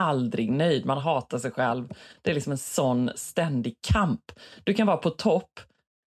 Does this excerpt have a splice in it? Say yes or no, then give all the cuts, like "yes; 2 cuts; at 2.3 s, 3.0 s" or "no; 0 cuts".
no; 0 cuts